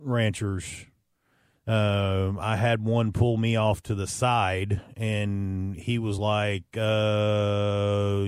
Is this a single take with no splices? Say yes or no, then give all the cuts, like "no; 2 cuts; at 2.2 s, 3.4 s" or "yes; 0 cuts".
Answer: yes; 0 cuts